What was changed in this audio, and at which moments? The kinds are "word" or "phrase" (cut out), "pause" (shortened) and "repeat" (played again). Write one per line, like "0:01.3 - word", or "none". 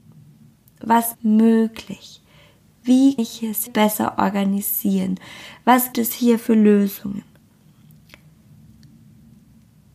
0:01.1 - word
0:03.2 - word
0:03.7 - word
0:05.9 - word